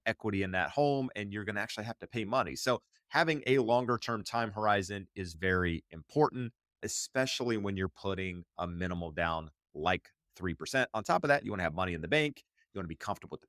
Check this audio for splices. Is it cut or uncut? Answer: uncut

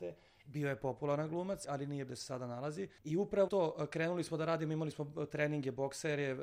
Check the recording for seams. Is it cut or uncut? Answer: cut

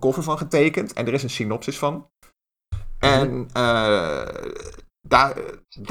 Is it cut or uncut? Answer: uncut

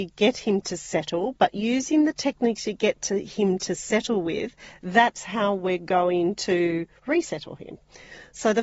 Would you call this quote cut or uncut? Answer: uncut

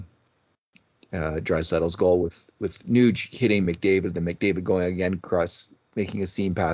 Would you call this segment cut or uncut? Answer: uncut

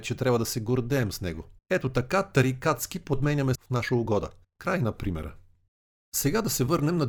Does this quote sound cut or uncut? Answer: cut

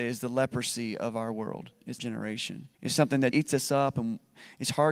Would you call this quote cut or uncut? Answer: cut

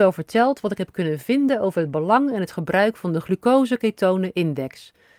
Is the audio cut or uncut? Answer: uncut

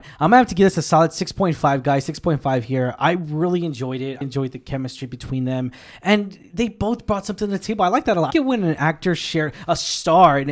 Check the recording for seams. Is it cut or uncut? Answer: cut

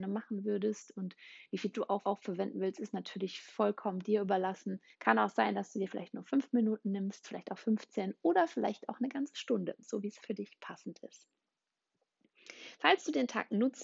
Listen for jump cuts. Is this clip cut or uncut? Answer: cut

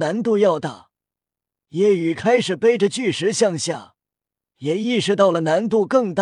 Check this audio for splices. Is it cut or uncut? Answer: uncut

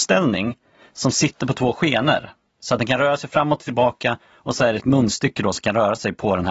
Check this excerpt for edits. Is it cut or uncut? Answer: uncut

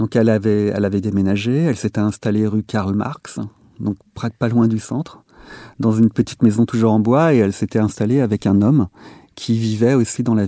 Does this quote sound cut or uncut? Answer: uncut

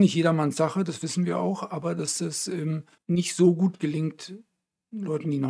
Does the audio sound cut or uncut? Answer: cut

